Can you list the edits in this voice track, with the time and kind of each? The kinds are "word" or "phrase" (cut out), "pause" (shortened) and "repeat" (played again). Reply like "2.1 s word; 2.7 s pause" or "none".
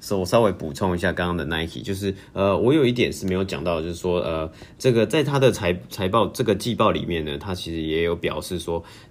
none